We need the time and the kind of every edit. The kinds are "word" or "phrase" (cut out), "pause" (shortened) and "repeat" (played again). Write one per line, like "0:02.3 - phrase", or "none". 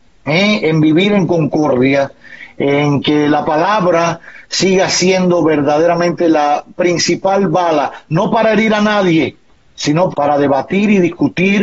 0:10.1 - word